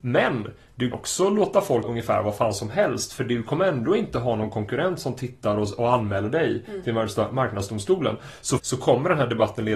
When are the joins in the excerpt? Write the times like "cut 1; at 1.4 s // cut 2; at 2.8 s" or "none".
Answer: cut 1; at 0.9 s // cut 2; at 1.8 s // cut 3; at 8.6 s